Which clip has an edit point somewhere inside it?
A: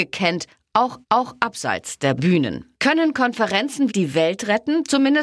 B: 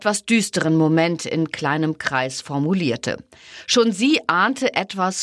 A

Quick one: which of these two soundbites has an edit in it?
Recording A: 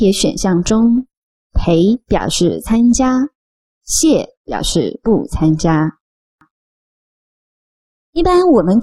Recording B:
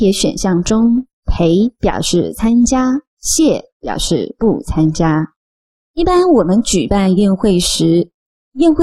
B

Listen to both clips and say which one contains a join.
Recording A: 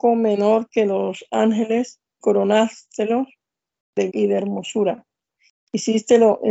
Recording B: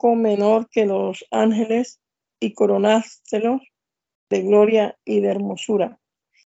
A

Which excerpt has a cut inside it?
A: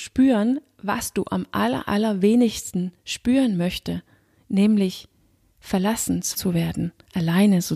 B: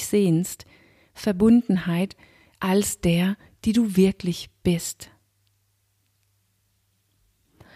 A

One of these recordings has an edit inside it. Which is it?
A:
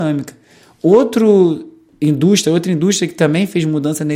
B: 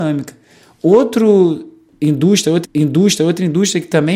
B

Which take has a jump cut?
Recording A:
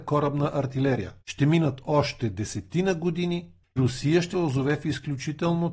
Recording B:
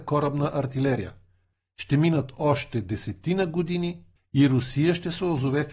A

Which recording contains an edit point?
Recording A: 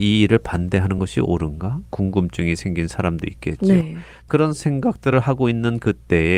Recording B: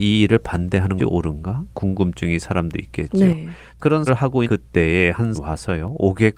B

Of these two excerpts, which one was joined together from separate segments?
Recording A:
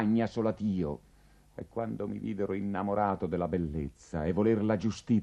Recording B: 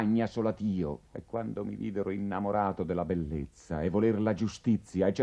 B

